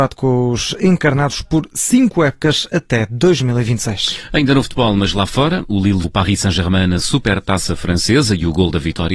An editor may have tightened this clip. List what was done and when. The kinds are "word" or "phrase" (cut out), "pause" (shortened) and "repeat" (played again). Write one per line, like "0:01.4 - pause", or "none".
0:06.0 - word